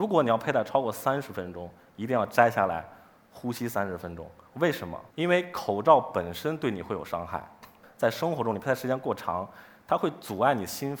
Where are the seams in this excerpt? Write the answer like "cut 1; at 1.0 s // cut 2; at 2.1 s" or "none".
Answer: cut 1; at 5.1 s